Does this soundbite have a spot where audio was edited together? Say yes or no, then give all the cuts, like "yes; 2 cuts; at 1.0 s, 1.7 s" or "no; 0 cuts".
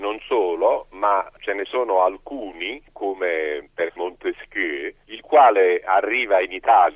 yes; 2 cuts; at 3.9 s, 5.0 s